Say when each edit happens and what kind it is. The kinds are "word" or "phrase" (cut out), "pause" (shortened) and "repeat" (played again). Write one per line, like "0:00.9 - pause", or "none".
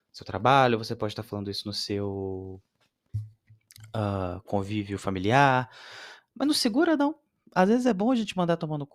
none